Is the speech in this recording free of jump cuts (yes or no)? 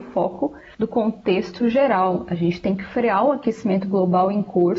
yes